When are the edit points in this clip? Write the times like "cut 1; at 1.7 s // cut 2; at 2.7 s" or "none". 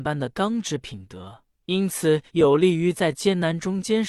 cut 1; at 1.5 s // cut 2; at 2.3 s